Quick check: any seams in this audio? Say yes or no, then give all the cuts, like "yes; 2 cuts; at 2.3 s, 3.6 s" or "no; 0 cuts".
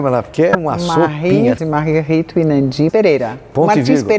yes; 2 cuts; at 1.6 s, 2.9 s